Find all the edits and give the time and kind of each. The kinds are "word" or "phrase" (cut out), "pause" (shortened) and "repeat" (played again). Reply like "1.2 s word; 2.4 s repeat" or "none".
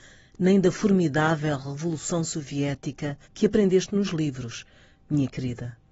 3.2 s pause